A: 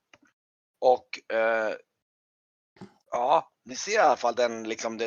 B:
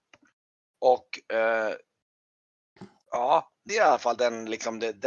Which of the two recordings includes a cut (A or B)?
B